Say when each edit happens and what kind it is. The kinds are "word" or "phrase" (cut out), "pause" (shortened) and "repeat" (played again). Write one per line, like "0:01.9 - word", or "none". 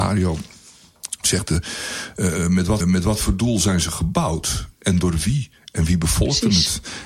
0:02.8 - repeat